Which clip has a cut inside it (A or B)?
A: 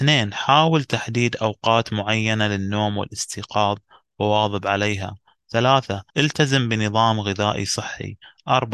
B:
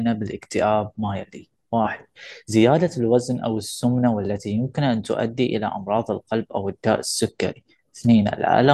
A